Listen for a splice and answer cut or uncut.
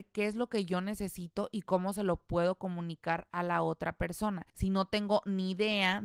cut